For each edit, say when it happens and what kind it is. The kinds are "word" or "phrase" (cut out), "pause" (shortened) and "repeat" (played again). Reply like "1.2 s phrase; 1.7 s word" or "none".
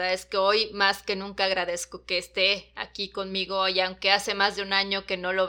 none